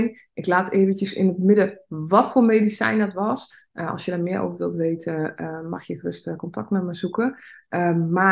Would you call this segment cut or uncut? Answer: uncut